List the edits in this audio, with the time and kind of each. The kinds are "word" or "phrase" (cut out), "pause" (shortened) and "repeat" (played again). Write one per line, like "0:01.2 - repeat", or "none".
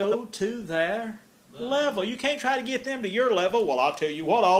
none